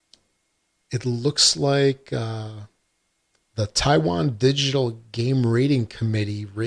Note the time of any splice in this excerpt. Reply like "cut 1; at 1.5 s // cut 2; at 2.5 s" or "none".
none